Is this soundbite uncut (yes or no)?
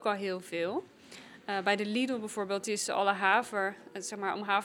yes